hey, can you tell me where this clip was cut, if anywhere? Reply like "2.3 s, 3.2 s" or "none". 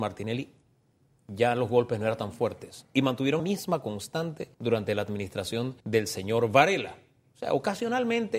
3.4 s, 4.5 s, 5.8 s